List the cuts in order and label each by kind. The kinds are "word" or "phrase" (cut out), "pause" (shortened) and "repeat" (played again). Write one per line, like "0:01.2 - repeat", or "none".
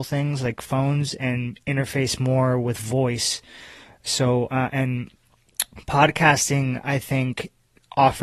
none

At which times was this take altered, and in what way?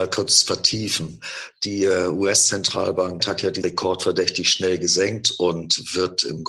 0:03.2 - word
0:03.6 - word

